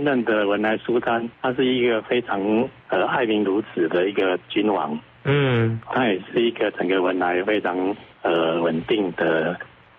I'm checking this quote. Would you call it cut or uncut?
cut